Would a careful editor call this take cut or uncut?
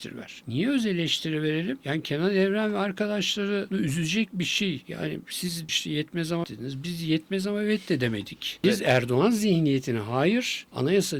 cut